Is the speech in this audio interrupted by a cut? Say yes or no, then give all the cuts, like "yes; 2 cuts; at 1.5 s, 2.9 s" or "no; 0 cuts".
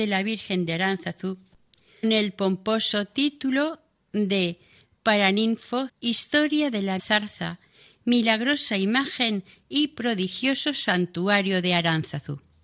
yes; 3 cuts; at 2.0 s, 5.9 s, 7.0 s